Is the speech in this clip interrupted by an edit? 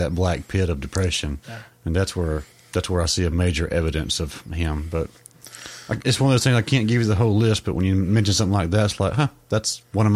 yes; 2 cuts; at 1.4 s, 2.5 s

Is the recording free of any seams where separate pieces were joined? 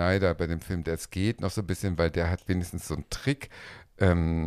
yes; 0 cuts

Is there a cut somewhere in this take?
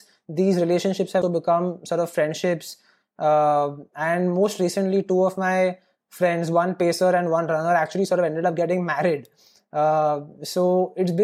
yes; 1 cut; at 1.2 s

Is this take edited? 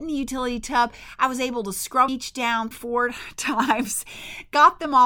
yes; 2 cuts; at 2.1 s, 2.7 s

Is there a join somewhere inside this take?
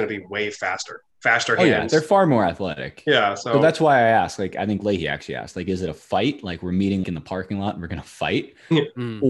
yes; 2 cuts; at 1.1 s, 7.0 s

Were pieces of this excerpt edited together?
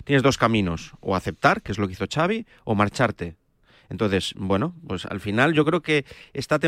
no; 0 cuts

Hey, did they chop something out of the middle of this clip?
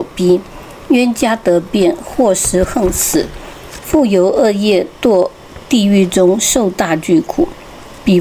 no; 0 cuts

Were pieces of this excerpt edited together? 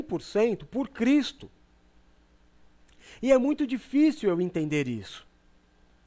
no; 0 cuts

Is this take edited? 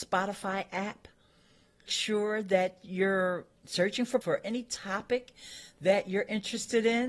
yes; 3 cuts; at 1.9 s, 3.6 s, 4.2 s

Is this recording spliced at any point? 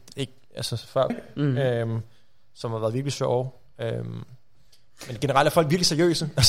yes; 1 cut; at 1.1 s

